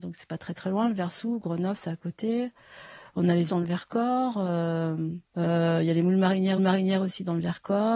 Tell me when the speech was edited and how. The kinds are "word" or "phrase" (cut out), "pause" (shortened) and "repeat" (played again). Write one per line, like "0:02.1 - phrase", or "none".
0:03.5 - word
0:05.3 - pause
0:06.6 - repeat